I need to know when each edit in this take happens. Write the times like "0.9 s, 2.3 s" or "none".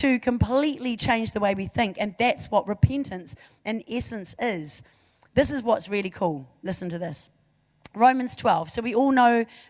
none